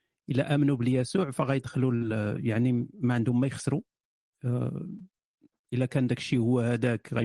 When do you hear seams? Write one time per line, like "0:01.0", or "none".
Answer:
none